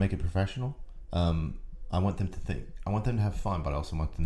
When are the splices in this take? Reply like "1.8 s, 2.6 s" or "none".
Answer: none